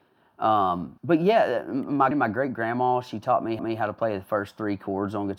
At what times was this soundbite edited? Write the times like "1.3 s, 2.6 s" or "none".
1.0 s, 2.1 s, 3.6 s